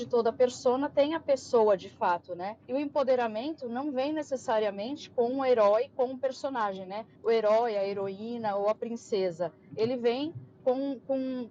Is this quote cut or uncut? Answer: cut